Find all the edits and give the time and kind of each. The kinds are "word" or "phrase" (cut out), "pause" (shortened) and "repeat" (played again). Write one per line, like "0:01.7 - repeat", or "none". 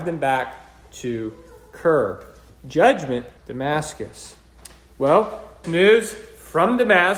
0:03.4 - word
0:05.6 - word